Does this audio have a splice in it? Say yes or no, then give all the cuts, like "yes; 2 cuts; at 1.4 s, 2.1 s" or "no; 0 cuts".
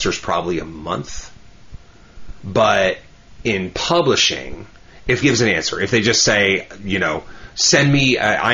yes; 1 cut; at 5.2 s